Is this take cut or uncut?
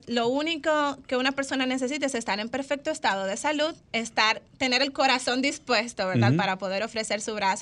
cut